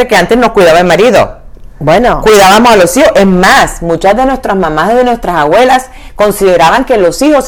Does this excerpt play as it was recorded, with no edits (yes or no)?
yes